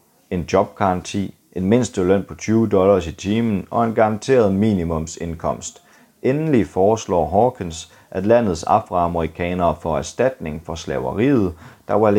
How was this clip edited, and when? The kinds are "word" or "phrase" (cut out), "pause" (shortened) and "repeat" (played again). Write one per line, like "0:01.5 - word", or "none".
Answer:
none